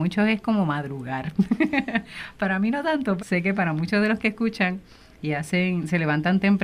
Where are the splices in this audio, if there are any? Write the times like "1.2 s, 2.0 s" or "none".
3.2 s